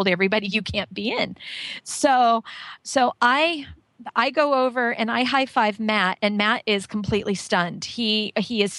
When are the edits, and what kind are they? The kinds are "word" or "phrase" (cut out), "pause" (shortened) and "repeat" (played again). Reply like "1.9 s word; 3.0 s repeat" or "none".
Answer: 6.6 s word